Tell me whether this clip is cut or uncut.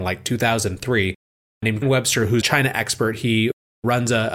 cut